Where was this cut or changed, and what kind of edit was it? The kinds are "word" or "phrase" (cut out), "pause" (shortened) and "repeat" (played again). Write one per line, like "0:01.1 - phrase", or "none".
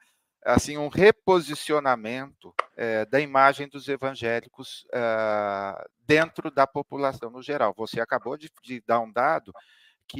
0:02.7 - pause
0:08.6 - pause